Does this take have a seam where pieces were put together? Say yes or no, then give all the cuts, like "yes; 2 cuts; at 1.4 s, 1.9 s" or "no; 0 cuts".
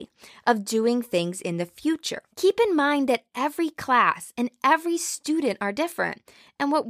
yes; 1 cut; at 2.3 s